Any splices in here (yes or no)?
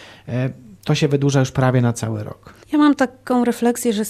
yes